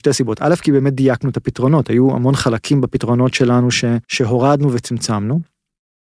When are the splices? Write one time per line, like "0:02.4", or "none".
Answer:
0:04.0